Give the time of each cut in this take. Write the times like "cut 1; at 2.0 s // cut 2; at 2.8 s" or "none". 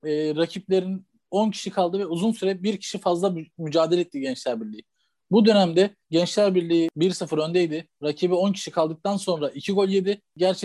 cut 1; at 6.0 s